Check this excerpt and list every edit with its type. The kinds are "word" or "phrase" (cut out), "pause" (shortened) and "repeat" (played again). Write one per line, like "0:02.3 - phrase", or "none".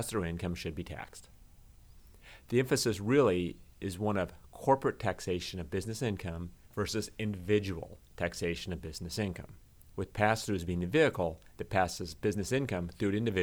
0:06.6 - pause